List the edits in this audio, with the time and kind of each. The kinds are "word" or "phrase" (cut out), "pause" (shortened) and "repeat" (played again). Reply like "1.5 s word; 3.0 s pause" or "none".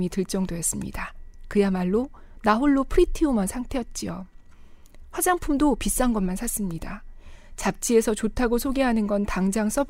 none